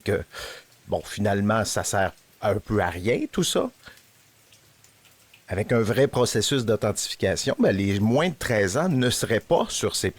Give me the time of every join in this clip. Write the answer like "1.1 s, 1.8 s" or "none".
none